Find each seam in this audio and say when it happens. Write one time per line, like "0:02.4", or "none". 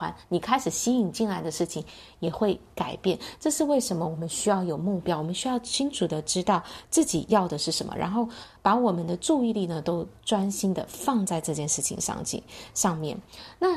0:08.6

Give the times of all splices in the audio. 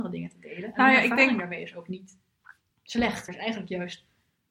0:03.3

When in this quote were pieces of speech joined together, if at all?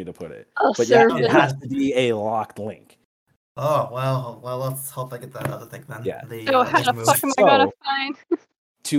none

